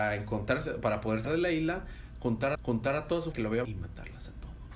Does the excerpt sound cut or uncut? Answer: cut